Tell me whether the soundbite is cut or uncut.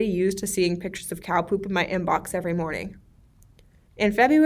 uncut